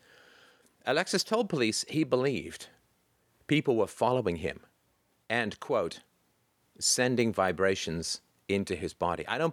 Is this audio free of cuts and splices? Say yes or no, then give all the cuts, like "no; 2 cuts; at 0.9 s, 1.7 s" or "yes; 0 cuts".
yes; 0 cuts